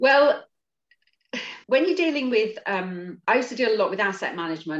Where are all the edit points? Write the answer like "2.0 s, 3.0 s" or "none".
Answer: 1.6 s